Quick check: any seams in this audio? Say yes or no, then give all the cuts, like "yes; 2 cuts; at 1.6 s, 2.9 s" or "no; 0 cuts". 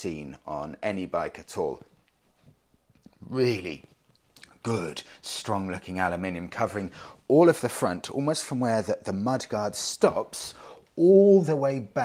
no; 0 cuts